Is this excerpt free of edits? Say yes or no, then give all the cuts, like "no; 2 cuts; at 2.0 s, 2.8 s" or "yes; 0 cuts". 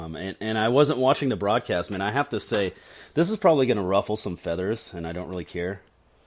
yes; 0 cuts